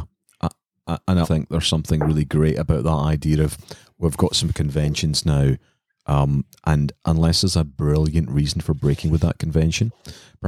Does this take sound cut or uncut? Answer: cut